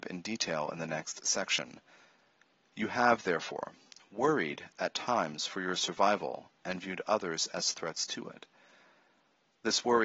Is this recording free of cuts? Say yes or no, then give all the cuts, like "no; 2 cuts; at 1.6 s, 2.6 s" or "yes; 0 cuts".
yes; 0 cuts